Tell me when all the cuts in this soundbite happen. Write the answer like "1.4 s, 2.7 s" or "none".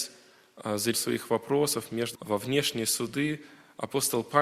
0.9 s, 2.1 s